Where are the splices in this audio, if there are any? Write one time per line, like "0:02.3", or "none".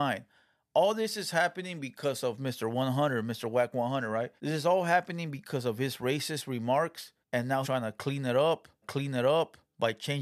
0:04.4
0:07.2
0:07.6
0:08.8